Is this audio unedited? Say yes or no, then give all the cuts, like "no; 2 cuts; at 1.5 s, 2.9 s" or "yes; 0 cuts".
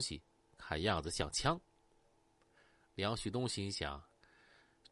yes; 0 cuts